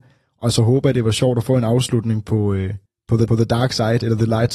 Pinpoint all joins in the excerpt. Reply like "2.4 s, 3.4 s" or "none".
2.9 s, 3.3 s